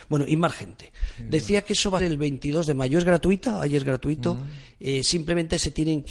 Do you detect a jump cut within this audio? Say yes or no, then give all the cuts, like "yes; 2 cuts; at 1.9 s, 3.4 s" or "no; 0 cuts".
yes; 1 cut; at 2.0 s